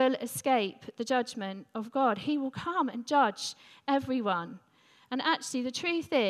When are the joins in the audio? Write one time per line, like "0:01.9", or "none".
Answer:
none

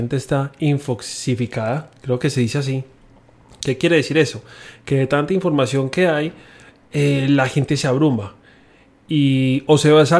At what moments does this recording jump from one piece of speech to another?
none

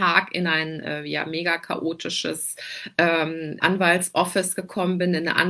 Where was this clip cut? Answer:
0:03.6

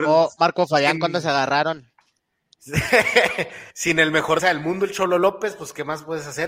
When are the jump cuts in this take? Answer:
0:03.7
0:04.4

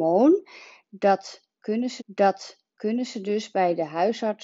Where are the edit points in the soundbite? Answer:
0:02.0

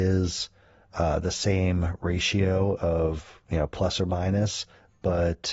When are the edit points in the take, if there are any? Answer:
none

